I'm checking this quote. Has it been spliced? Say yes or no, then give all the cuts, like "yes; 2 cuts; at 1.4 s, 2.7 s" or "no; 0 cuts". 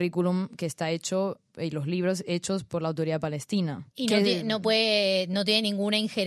yes; 1 cut; at 3.9 s